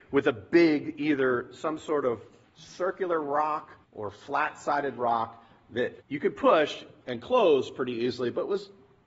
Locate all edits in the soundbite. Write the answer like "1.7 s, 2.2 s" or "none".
2.4 s, 3.8 s, 6.0 s